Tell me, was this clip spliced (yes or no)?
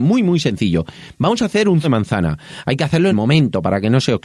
yes